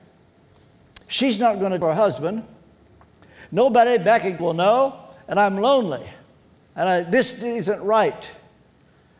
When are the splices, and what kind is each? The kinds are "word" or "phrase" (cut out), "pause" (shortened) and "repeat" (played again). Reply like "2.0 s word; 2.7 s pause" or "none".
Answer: 1.8 s word; 4.4 s word; 6.4 s pause